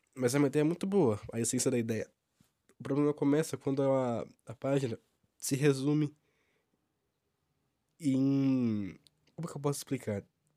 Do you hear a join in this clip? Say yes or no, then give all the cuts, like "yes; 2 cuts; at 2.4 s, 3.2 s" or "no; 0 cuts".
no; 0 cuts